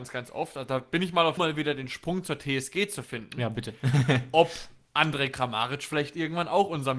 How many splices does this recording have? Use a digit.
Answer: 1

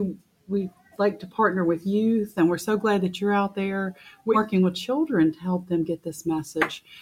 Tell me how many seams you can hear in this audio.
1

